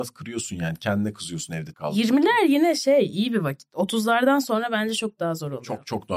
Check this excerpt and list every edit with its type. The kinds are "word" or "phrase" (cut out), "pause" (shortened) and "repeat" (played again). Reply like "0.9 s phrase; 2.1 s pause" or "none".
1.7 s word